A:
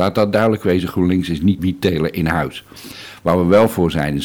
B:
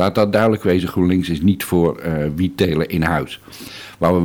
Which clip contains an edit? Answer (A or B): A